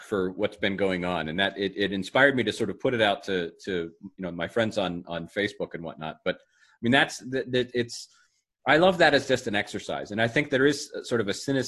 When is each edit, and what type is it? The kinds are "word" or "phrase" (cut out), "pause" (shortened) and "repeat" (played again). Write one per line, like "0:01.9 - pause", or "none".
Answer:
none